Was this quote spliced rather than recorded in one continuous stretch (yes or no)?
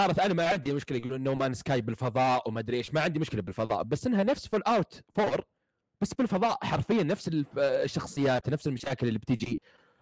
no